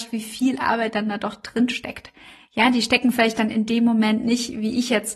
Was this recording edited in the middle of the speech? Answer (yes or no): no